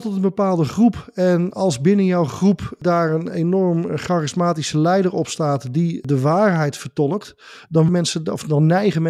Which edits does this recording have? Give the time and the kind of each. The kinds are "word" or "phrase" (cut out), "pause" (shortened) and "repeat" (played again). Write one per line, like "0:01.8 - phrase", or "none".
0:07.9 - word